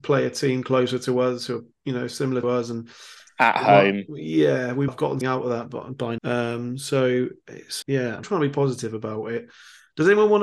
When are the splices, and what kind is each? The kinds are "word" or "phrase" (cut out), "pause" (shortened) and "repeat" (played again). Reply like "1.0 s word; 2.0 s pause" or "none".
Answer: 2.4 s word; 4.9 s word; 5.2 s word; 6.2 s word; 7.8 s word; 8.2 s word

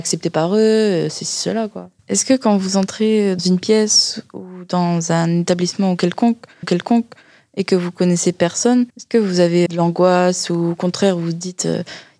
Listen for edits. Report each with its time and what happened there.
2.0 s pause; 3.4 s word; 6.6 s repeat; 8.9 s pause; 9.7 s word

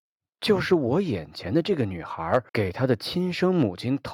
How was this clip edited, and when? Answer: 2.5 s pause

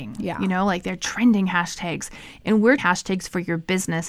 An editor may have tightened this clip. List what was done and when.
2.8 s phrase

